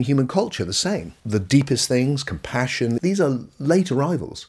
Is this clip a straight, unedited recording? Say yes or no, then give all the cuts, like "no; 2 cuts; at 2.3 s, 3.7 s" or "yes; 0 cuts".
no; 2 cuts; at 1.2 s, 3.0 s